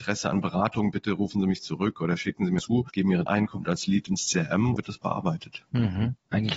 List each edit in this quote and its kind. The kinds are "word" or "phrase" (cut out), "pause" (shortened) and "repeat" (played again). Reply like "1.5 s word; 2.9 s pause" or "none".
2.6 s word; 3.3 s word; 4.8 s phrase